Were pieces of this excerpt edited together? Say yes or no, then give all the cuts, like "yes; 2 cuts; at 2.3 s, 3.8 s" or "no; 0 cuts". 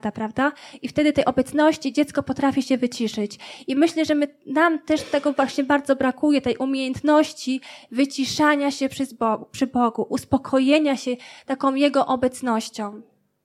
no; 0 cuts